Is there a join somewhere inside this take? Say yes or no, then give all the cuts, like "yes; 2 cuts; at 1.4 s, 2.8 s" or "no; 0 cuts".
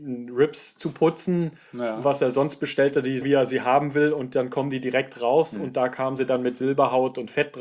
yes; 1 cut; at 3.2 s